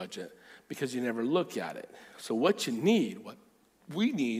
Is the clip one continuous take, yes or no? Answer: yes